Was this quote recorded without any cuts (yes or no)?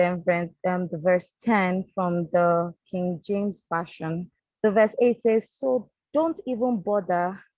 no